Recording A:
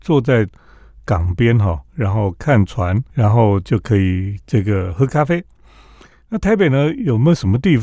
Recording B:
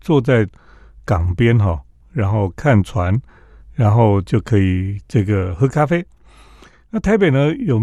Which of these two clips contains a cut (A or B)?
A